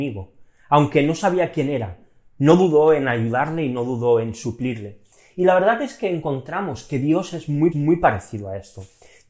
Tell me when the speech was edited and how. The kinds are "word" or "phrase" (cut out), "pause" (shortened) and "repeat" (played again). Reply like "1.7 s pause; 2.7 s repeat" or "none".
7.7 s repeat